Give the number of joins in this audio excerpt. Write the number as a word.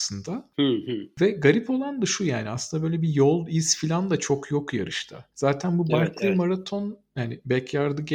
one